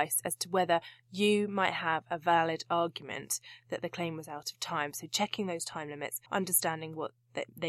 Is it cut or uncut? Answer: cut